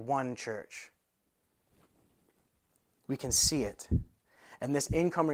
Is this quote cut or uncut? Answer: uncut